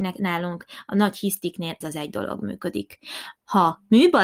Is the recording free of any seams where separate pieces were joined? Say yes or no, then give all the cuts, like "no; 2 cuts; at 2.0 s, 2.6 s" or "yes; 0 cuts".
no; 1 cut; at 1.8 s